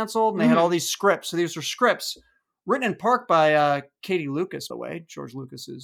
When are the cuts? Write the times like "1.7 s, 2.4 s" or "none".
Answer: 4.7 s